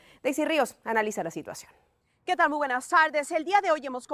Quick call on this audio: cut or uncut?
uncut